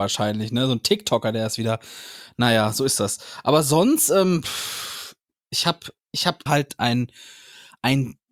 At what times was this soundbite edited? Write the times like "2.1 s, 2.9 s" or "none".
6.5 s

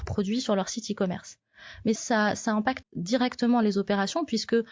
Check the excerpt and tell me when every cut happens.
2.0 s, 2.8 s

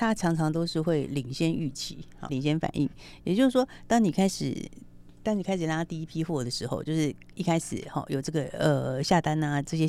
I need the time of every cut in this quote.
2.3 s

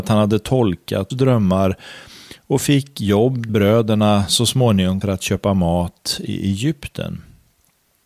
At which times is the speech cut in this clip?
1.1 s, 3.5 s, 5.0 s

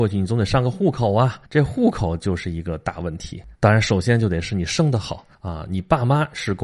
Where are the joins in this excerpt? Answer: 1.4 s, 3.5 s, 5.3 s

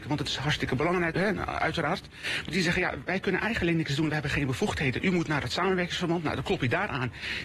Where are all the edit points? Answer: 1.1 s, 2.5 s

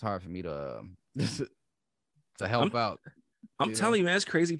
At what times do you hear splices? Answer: none

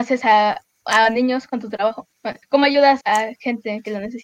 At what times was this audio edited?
2.4 s, 3.0 s

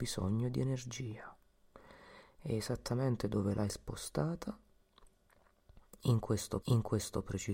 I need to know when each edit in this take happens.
6.6 s

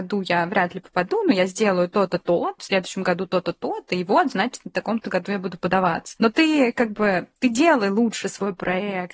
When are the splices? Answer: 2.6 s

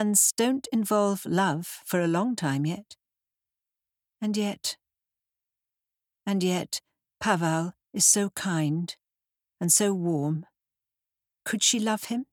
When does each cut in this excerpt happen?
none

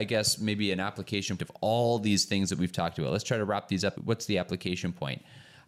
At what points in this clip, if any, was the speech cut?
1.4 s, 4.0 s

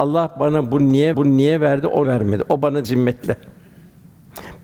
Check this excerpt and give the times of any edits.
1.1 s, 2.0 s, 2.8 s

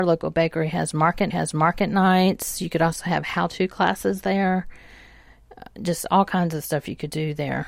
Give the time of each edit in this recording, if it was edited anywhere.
1.3 s

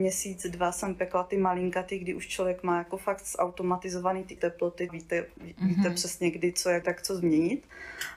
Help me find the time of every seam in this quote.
4.4 s, 4.9 s, 6.8 s

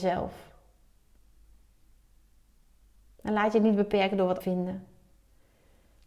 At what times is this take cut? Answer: 4.4 s

